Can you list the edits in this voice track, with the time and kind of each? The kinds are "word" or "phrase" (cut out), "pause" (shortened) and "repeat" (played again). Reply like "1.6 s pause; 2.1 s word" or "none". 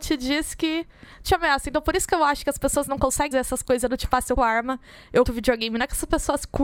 1.2 s word; 3.3 s word; 4.4 s word; 5.3 s word